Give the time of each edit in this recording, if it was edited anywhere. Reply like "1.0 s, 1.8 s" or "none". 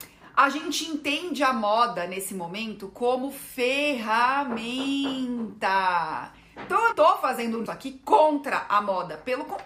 6.9 s, 7.7 s

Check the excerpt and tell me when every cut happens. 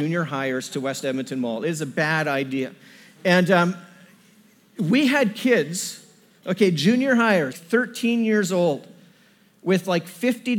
7.5 s

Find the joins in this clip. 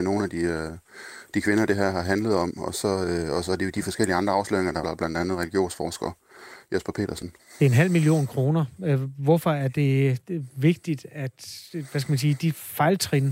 4.8 s, 7.4 s

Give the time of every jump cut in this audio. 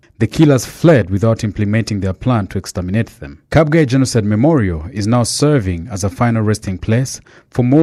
3.5 s

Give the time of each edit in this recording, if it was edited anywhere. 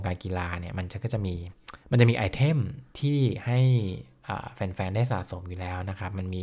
1.8 s

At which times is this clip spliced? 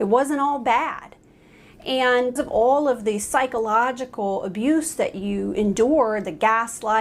2.4 s

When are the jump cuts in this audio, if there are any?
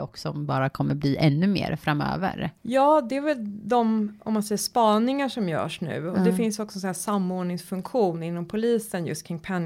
2.6 s

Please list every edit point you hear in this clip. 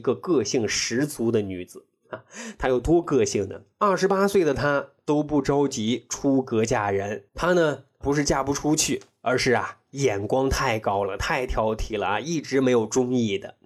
7.3 s

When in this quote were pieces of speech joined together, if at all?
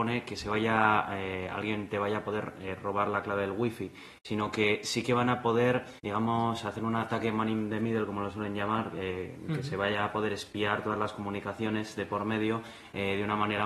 6.0 s

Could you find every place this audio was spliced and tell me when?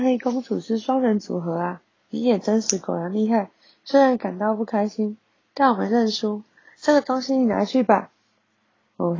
2.0 s

